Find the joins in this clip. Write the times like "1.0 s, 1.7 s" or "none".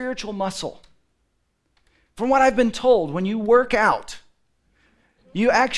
none